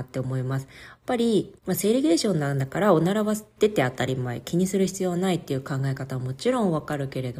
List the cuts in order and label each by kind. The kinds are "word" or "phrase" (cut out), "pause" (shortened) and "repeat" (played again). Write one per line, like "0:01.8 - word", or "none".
0:01.6 - pause